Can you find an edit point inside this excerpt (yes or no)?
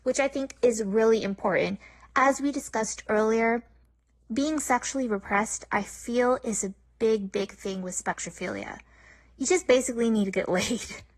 no